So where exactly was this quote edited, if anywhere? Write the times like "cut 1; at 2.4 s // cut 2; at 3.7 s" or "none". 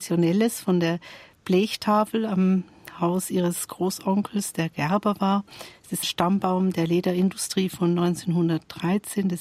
cut 1; at 6.0 s